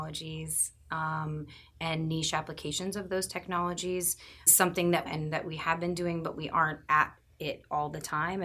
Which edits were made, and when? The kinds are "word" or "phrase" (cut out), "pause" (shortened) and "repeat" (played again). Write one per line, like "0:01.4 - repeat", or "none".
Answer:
0:04.5 - phrase
0:05.0 - phrase
0:06.9 - word